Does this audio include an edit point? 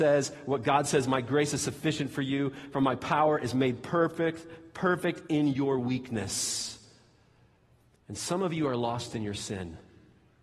no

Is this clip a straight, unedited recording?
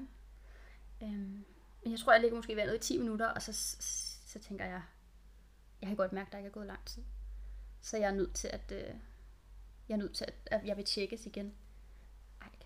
yes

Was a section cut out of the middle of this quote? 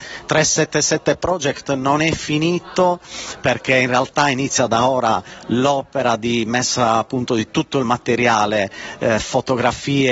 no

